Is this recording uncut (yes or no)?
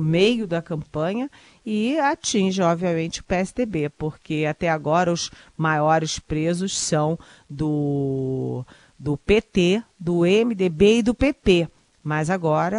yes